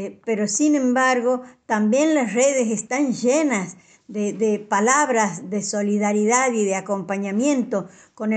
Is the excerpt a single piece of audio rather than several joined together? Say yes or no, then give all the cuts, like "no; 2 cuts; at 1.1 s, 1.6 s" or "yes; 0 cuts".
yes; 0 cuts